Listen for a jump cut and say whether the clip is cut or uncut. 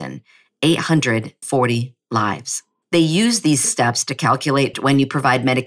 cut